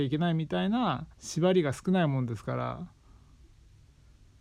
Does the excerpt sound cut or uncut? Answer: cut